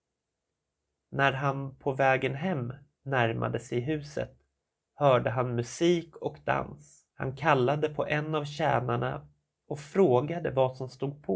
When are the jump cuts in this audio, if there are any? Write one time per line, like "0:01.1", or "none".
0:07.1